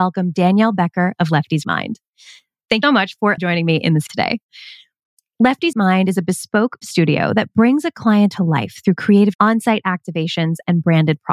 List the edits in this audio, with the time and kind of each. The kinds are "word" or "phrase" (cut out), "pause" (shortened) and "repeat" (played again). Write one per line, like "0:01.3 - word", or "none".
0:01.6 - word
0:02.8 - word
0:03.4 - word
0:04.1 - word
0:05.7 - word
0:06.8 - word
0:08.3 - word
0:09.3 - word